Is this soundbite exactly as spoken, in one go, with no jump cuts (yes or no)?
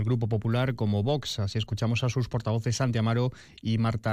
yes